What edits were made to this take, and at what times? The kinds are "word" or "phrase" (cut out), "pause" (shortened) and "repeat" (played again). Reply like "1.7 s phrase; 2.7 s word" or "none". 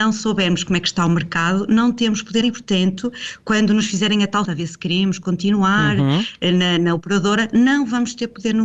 2.4 s word; 4.4 s word